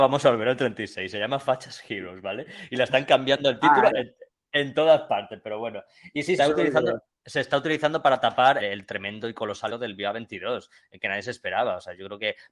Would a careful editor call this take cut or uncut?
cut